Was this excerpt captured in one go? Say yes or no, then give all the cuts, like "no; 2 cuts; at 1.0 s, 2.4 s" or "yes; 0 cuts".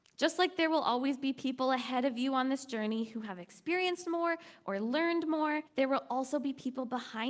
no; 1 cut; at 5.7 s